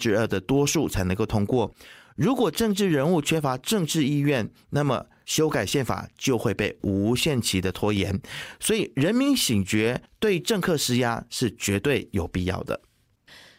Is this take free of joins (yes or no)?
yes